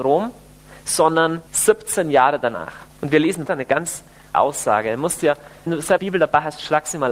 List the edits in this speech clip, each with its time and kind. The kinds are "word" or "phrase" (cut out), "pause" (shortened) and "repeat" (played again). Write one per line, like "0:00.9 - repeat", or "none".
0:01.5 - pause
0:02.9 - pause
0:03.5 - word
0:04.3 - word
0:05.7 - word
0:06.0 - word

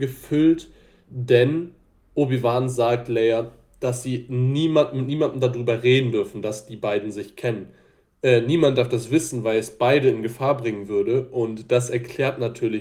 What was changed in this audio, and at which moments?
none

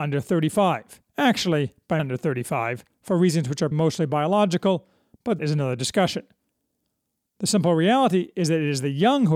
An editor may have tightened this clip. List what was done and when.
0:01.1 - pause
0:02.0 - word
0:03.7 - word
0:05.4 - word

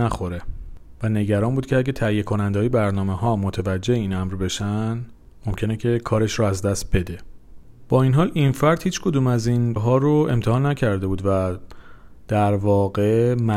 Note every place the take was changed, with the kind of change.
0:09.8 - word

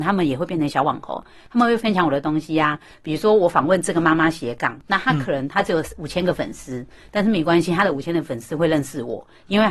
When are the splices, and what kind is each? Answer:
none

